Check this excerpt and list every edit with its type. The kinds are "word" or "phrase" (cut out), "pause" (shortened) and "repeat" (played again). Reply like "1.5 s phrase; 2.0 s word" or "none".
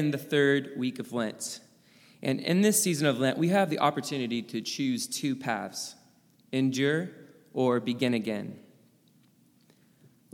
none